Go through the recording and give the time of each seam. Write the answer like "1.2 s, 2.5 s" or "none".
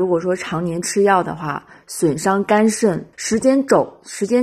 3.1 s